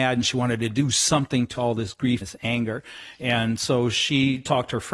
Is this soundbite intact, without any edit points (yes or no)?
no